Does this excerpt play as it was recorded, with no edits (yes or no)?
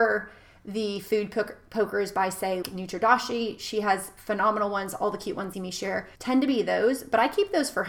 no